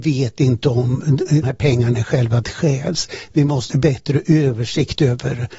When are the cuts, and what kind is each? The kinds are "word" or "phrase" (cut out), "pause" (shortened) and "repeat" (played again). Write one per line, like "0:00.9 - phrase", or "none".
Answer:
0:01.4 - word
0:02.4 - word
0:03.7 - word